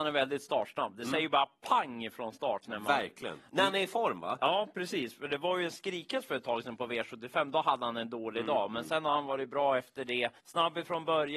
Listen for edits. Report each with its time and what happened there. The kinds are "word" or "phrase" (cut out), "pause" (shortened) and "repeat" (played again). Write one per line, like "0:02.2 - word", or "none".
0:10.4 - pause

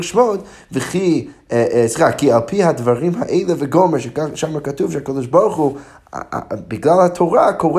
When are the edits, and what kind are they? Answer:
none

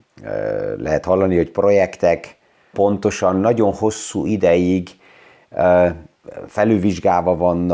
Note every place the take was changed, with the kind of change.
0:02.7 - word

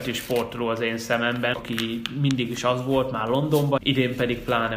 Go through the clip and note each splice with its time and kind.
0:01.5 - word
0:03.8 - phrase

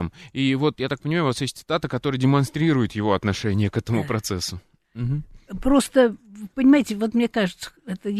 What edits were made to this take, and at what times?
none

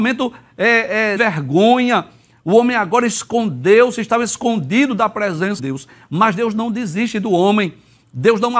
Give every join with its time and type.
0:01.2 - phrase
0:05.6 - word

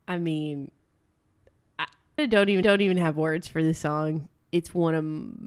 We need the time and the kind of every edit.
0:02.2 - phrase
0:02.6 - repeat

